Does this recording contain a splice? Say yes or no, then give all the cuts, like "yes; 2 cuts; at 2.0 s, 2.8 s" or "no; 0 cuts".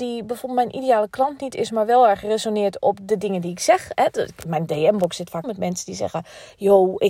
yes; 2 cuts; at 2.8 s, 5.4 s